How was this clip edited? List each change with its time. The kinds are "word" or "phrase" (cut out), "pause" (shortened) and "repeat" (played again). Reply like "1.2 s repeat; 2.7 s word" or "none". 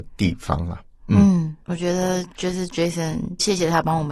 1.6 s pause